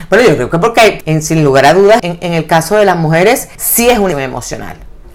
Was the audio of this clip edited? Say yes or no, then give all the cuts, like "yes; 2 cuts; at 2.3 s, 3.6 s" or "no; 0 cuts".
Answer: yes; 4 cuts; at 1.0 s, 2.0 s, 3.5 s, 4.1 s